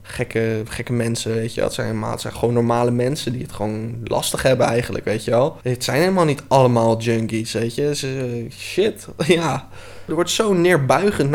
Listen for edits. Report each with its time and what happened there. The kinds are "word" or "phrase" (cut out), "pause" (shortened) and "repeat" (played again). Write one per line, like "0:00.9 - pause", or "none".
0:02.3 - phrase
0:05.6 - pause